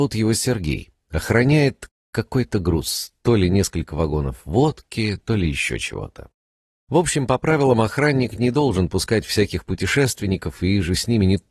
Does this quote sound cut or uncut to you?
uncut